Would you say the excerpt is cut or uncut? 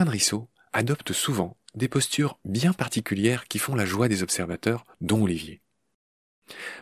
cut